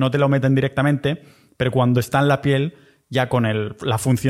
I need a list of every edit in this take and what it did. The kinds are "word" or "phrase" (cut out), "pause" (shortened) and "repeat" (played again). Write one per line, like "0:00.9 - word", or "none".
none